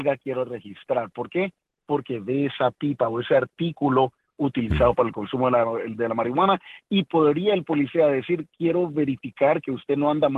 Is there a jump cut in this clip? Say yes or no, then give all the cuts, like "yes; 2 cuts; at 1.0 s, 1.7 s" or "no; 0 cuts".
no; 0 cuts